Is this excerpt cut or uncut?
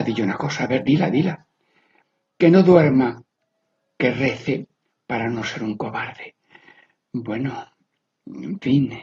uncut